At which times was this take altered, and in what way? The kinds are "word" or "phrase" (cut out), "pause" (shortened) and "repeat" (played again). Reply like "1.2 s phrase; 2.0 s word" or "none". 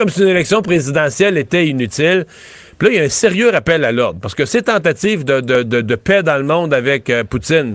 none